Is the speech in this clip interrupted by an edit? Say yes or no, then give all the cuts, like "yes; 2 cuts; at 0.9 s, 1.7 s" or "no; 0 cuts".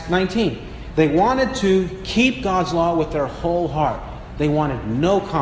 no; 0 cuts